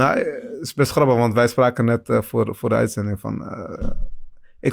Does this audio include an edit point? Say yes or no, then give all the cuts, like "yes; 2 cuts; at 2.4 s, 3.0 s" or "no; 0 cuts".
no; 0 cuts